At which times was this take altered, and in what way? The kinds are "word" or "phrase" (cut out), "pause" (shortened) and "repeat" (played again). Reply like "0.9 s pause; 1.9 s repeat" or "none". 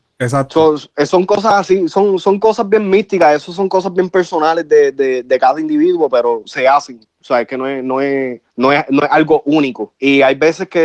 8.4 s pause; 10.0 s pause